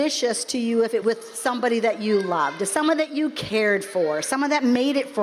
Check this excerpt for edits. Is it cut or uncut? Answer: cut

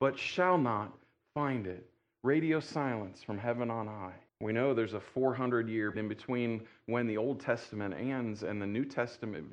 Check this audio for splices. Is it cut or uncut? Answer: cut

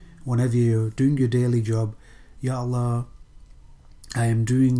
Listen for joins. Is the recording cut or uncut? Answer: uncut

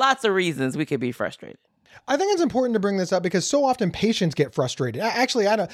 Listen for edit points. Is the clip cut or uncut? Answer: uncut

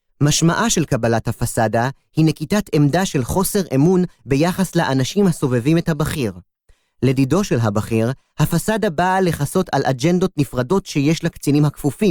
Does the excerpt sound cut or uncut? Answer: uncut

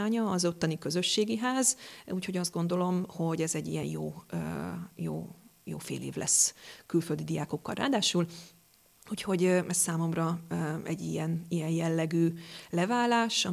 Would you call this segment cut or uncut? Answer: uncut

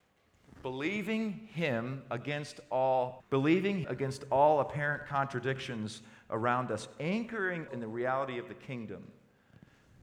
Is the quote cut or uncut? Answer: cut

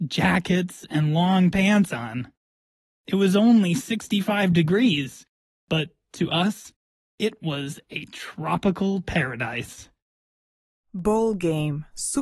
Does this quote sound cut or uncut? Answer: uncut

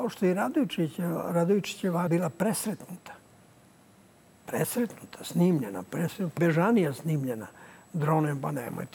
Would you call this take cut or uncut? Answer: cut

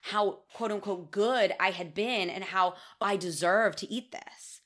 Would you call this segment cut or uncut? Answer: cut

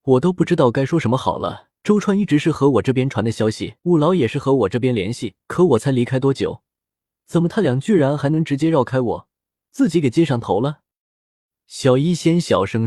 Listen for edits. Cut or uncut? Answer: cut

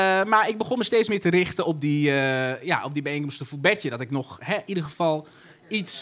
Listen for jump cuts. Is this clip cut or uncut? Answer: uncut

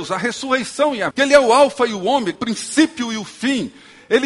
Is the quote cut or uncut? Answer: cut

